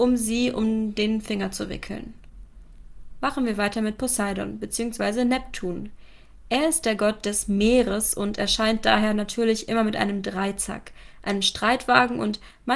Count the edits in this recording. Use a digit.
0